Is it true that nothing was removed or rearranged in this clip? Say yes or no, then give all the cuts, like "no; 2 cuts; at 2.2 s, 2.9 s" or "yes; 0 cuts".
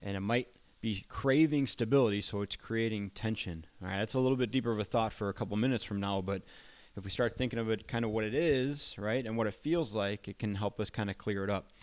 yes; 0 cuts